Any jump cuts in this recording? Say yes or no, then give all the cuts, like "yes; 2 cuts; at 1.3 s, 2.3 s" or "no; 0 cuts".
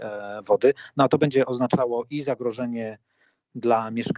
no; 0 cuts